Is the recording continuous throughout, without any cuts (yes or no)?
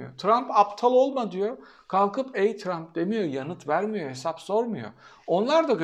yes